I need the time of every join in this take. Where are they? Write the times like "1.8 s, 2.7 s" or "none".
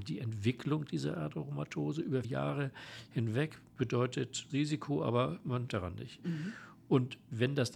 2.2 s, 4.5 s, 5.7 s